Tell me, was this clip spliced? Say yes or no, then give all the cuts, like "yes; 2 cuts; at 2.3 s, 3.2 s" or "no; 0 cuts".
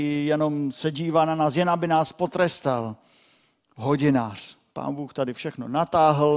no; 0 cuts